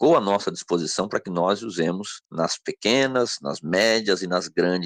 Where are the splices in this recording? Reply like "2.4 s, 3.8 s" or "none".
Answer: 2.2 s